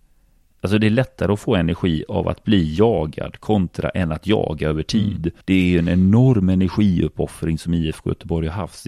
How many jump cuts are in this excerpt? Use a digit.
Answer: 1